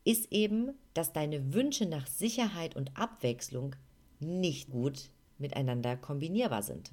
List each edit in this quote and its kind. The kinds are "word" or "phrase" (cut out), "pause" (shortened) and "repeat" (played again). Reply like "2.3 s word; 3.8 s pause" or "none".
4.7 s word